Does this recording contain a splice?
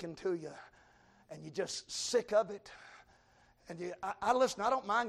no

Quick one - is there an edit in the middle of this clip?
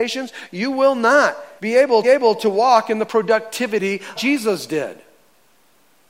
yes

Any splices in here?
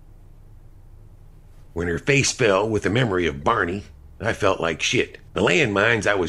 yes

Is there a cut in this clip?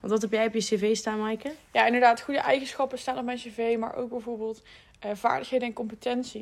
no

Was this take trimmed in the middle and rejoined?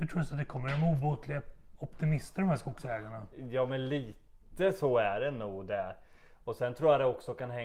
no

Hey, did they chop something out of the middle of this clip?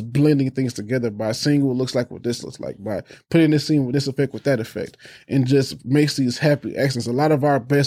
yes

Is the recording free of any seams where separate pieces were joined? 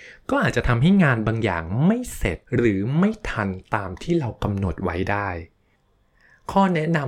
no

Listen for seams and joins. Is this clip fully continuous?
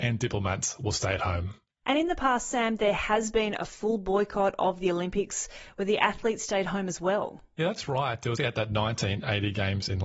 no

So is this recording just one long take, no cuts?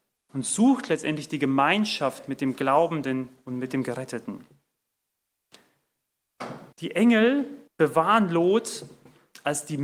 no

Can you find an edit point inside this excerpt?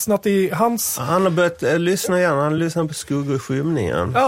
no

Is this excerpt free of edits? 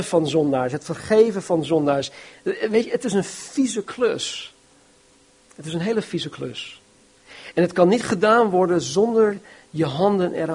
no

